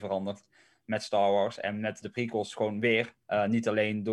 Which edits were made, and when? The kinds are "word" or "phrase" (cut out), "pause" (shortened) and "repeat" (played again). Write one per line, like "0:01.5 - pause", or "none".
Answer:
0:02.0 - word
0:03.2 - pause